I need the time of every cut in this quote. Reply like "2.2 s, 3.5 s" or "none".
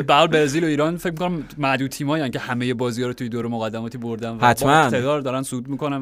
none